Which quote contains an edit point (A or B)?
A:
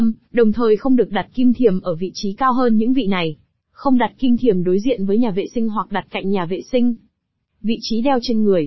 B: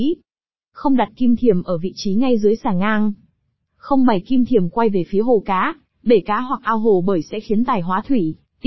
A